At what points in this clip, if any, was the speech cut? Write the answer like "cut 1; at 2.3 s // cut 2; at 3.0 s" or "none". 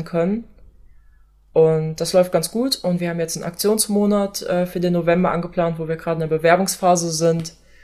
none